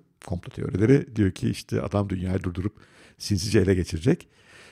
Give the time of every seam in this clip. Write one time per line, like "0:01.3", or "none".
none